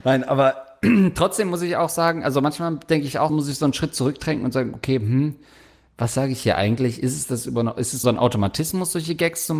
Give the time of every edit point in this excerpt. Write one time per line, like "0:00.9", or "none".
0:03.3
0:08.0